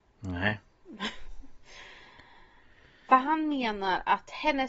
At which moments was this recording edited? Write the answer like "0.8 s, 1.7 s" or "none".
none